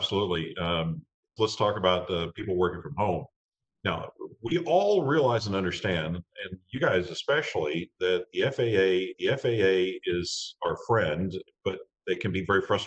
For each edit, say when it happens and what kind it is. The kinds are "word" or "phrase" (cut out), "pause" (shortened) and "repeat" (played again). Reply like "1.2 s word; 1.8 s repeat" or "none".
1.4 s word; 9.1 s repeat